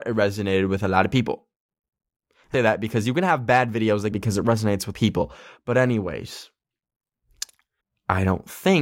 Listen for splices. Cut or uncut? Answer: cut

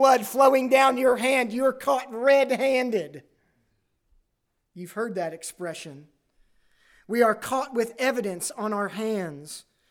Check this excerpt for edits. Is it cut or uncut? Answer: uncut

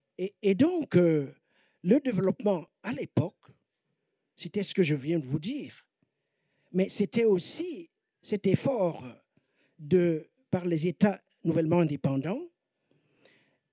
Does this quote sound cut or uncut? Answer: uncut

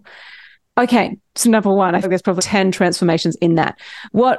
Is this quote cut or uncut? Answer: cut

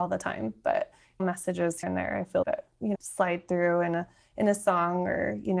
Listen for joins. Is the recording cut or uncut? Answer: cut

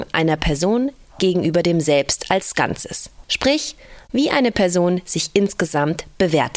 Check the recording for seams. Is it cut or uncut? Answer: cut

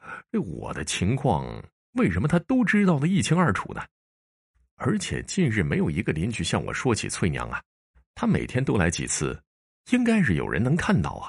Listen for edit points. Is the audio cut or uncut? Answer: uncut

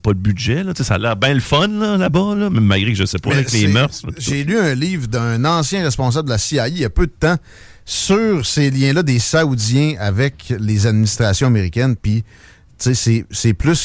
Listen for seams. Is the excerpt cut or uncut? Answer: uncut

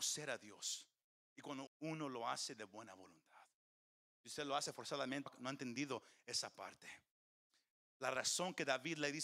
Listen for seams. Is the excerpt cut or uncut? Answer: cut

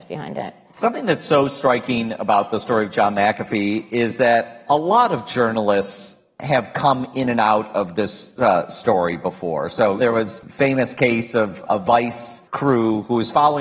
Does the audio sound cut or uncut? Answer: cut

